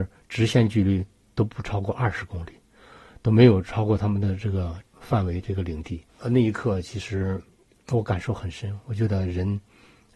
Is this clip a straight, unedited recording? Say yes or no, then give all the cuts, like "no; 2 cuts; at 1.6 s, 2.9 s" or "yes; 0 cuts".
no; 1 cut; at 6.1 s